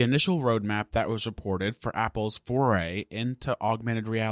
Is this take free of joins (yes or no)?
yes